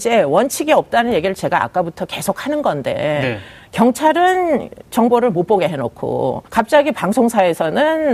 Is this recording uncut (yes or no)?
no